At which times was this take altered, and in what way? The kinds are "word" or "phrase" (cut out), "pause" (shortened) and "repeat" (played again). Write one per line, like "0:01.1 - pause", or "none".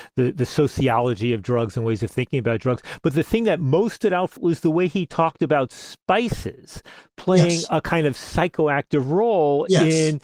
0:04.4 - word